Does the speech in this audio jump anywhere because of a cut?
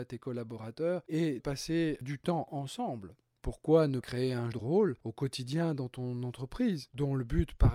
yes; 3 cuts; at 1.4 s, 4.0 s, 4.5 s

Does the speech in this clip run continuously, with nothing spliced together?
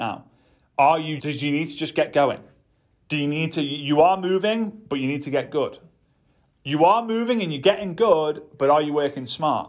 no; 1 cut; at 1.2 s

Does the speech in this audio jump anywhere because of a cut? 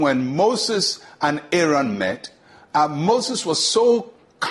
no; 0 cuts

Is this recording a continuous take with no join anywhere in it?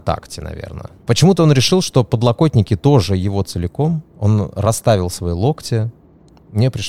yes; 0 cuts

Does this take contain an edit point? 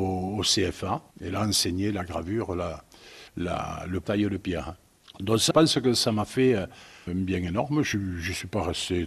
yes; 5 cuts; at 1.1 s, 3.3 s, 4.0 s, 5.5 s, 7.1 s

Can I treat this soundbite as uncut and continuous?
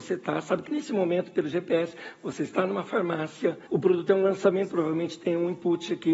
no; 1 cut; at 3.7 s

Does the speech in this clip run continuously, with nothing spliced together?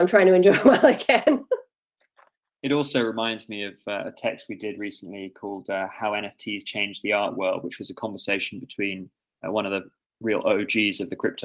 yes; 0 cuts

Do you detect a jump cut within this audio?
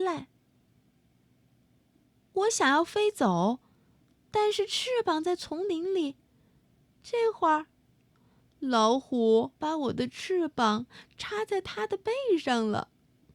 yes; 1 cut; at 9.6 s

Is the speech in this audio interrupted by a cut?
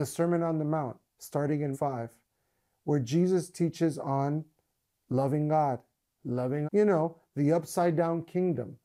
yes; 3 cuts; at 1.0 s, 1.7 s, 6.6 s

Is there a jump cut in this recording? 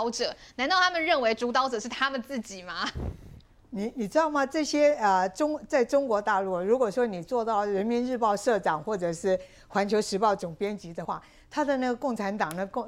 no; 0 cuts

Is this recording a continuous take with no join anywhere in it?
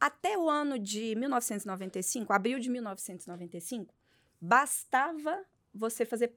yes; 0 cuts

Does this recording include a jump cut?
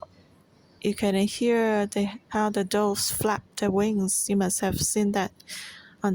no; 0 cuts

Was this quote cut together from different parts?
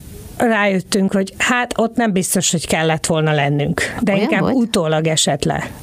no; 0 cuts

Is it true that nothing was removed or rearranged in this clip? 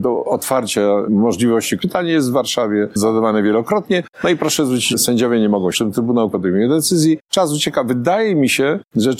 no; 4 cuts; at 1.8 s, 4.9 s, 5.7 s, 6.3 s

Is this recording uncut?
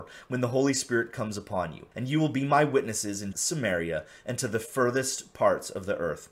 no; 2 cuts; at 1.9 s, 3.3 s

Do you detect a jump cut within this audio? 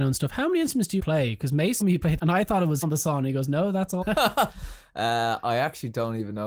yes; 5 cuts; at 1.0 s, 1.8 s, 2.2 s, 2.8 s, 4.0 s

